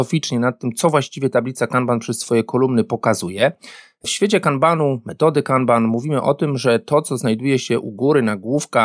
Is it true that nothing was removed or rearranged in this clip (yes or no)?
yes